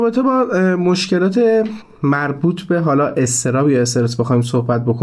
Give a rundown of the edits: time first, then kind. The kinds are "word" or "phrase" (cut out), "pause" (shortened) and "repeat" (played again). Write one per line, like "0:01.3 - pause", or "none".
none

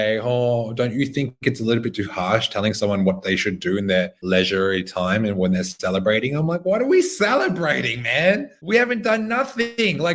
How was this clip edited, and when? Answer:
none

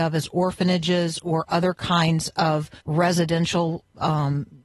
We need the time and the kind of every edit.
0:02.8 - pause

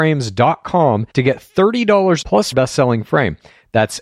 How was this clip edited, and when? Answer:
0:01.1 - pause
0:02.2 - word
0:02.5 - phrase

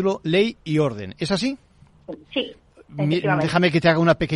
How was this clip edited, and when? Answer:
0:02.2 - pause

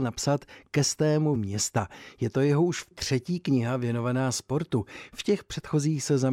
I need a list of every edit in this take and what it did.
0:01.4 - word
0:02.9 - word

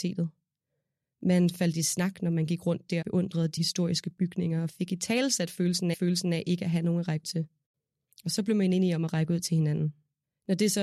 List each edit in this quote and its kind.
0:03.0 - word
0:03.6 - word
0:05.9 - repeat
0:07.2 - word

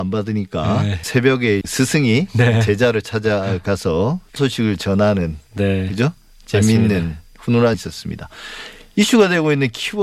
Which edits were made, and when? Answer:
0:01.6 - word
0:04.4 - word
0:07.7 - word

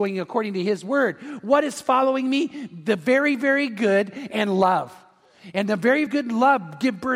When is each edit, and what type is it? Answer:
0:06.1 - word

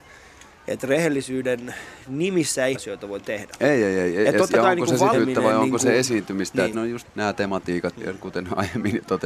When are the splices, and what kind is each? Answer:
0:02.7 - phrase
0:05.1 - word
0:06.7 - word
0:07.0 - word
0:07.9 - word

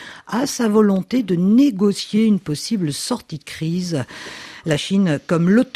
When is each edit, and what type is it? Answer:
none

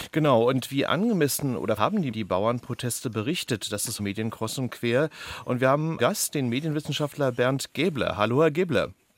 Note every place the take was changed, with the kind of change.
0:01.8 - phrase
0:02.1 - phrase
0:04.0 - phrase
0:06.0 - word

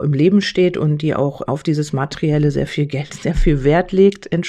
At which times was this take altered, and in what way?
0:01.5 - word
0:02.7 - phrase

